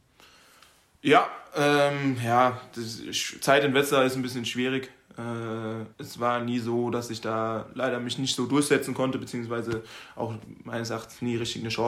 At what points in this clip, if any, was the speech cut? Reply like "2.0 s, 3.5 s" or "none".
5.9 s